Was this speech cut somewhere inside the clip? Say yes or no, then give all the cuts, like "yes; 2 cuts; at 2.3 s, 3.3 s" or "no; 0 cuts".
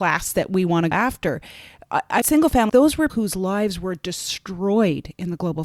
yes; 4 cuts; at 0.9 s, 2.2 s, 2.7 s, 3.1 s